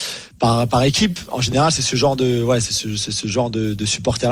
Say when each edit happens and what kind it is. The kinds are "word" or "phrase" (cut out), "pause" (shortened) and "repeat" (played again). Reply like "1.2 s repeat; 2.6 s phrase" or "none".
none